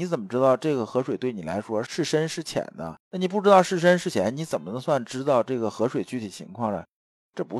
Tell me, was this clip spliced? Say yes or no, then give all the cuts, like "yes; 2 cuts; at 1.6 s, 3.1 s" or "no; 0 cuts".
yes; 1 cut; at 3.0 s